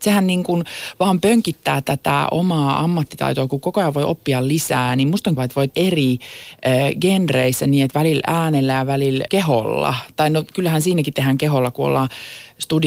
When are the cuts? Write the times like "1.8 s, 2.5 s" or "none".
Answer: 5.4 s, 5.7 s, 9.3 s